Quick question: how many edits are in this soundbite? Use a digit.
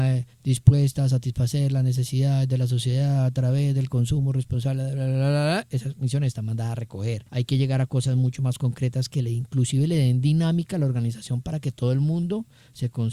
1